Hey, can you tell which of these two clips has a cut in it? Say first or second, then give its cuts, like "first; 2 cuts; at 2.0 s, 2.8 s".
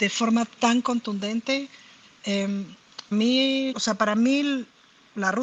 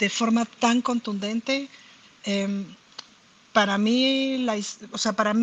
first; 2 cuts; at 3.1 s, 3.7 s